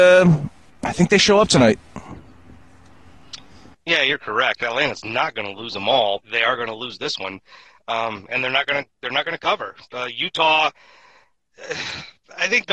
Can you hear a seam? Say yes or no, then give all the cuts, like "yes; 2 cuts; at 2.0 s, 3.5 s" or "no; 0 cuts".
yes; 1 cut; at 6.2 s